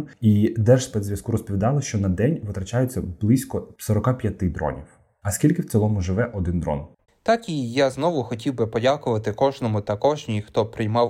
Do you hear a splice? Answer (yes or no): yes